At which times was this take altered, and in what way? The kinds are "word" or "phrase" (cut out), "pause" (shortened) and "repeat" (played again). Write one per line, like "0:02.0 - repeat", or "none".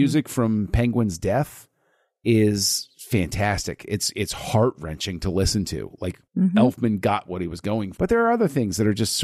0:06.2 - pause
0:07.9 - word